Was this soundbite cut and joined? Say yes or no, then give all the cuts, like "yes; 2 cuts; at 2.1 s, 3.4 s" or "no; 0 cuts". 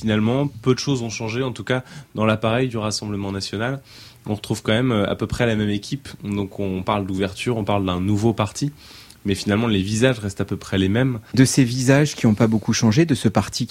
no; 0 cuts